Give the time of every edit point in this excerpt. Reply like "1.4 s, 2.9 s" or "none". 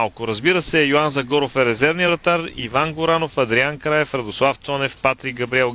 none